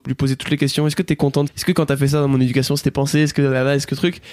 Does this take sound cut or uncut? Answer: cut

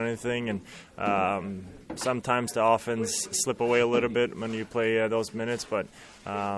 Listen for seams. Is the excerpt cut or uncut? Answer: uncut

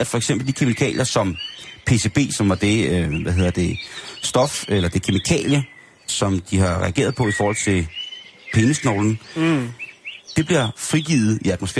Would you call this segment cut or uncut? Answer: uncut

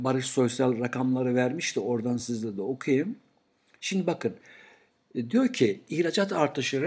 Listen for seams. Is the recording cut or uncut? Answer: uncut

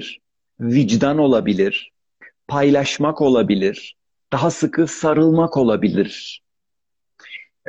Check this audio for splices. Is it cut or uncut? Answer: uncut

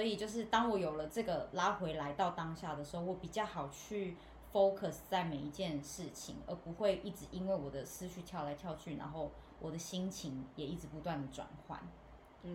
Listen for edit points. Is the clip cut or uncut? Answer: uncut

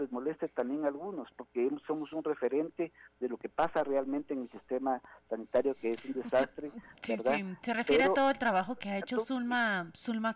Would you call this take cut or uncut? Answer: uncut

